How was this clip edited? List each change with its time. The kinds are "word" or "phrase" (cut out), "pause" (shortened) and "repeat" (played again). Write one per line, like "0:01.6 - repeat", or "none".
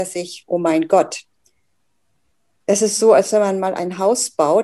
none